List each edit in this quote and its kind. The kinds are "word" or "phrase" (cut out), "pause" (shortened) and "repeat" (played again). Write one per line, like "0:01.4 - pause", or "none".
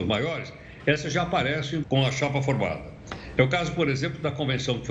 0:01.8 - word